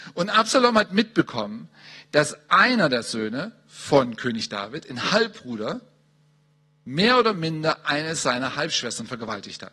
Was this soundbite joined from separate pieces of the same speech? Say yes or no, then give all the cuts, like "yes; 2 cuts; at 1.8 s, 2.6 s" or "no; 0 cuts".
no; 0 cuts